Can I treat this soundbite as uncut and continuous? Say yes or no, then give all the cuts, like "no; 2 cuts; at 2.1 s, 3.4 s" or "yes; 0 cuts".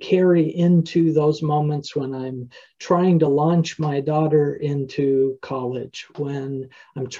yes; 0 cuts